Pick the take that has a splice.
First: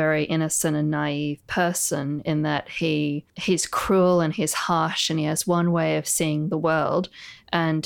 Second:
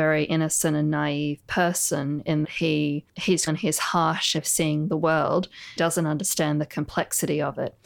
second; 4 cuts; at 2.4 s, 3.5 s, 4.4 s, 5.8 s

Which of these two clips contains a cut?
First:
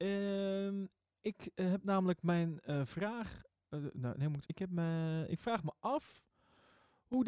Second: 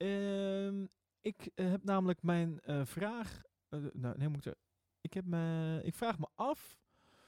first; 1 cut; at 4.4 s

